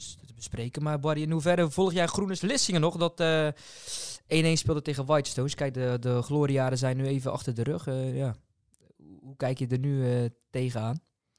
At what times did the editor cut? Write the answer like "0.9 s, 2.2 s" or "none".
2.4 s